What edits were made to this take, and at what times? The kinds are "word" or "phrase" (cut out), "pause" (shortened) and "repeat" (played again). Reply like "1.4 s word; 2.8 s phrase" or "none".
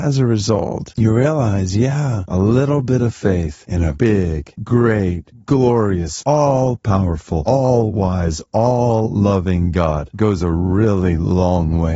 none